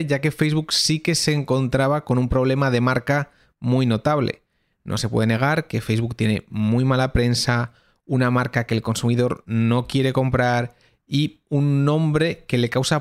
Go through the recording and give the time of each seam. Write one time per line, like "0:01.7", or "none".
none